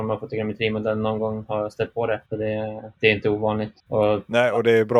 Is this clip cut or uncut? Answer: cut